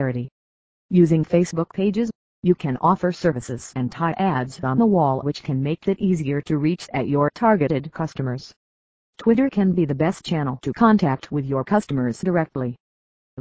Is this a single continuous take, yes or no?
yes